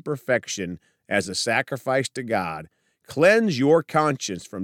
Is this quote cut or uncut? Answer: uncut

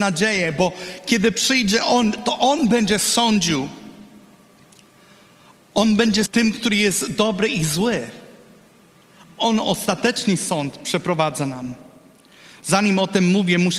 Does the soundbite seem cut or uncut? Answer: cut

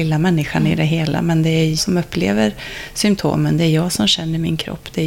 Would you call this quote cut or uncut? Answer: cut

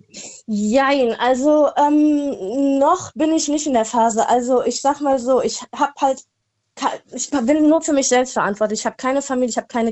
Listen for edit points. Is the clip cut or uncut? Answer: cut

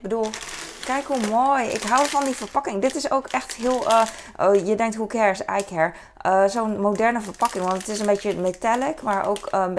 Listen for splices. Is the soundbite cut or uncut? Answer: uncut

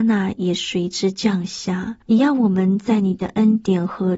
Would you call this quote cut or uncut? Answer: cut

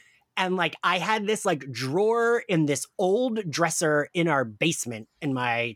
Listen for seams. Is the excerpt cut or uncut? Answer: uncut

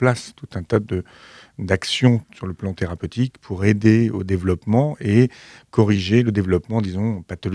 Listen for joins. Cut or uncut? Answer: uncut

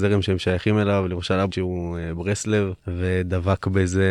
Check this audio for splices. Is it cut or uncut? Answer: cut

